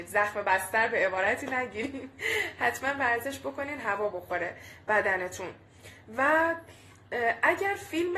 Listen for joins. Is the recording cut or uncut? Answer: uncut